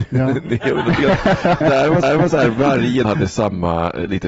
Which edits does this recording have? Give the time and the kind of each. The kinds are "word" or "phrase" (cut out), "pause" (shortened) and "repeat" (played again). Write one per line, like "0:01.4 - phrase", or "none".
0:01.6 - word
0:02.0 - repeat
0:03.0 - word